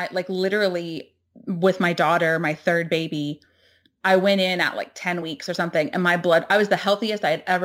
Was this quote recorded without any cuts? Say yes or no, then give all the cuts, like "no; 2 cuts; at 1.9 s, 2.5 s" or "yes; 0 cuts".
yes; 0 cuts